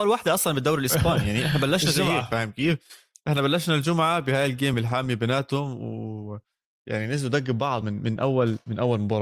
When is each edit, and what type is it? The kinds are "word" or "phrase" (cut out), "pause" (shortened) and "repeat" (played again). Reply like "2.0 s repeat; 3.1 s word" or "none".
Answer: none